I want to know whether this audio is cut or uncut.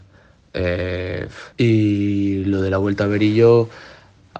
cut